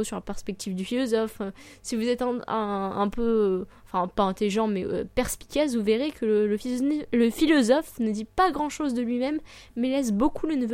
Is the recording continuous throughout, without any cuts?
yes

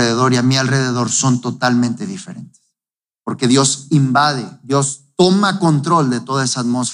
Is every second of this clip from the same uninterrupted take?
yes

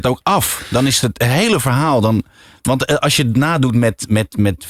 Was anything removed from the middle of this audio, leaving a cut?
no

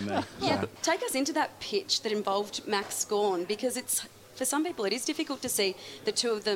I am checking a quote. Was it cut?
no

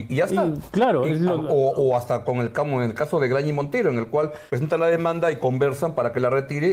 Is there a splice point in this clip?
yes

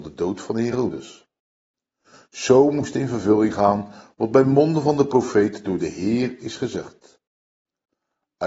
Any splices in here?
no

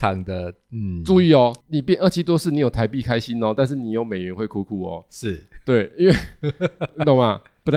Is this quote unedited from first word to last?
no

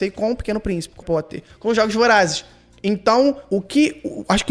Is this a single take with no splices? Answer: no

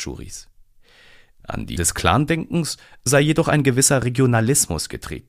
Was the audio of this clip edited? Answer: yes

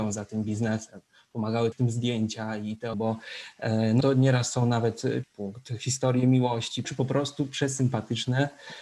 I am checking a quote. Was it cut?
yes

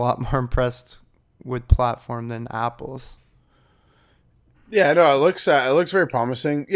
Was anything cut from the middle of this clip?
yes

